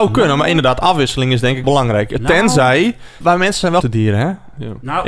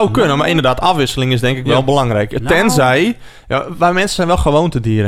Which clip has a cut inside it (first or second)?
first